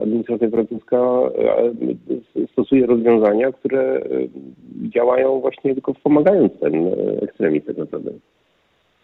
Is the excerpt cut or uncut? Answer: cut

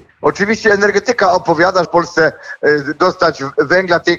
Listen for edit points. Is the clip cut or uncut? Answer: cut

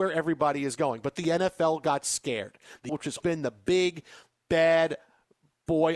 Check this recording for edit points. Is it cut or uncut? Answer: cut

